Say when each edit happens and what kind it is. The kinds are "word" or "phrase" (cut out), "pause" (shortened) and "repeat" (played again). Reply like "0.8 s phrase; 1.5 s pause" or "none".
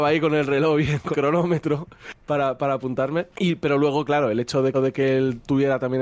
1.1 s word; 2.2 s pause; 3.3 s pause; 4.7 s repeat